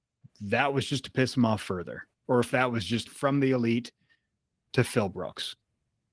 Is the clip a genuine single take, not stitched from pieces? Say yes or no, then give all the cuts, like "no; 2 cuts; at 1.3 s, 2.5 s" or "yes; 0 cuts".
no; 1 cut; at 3.1 s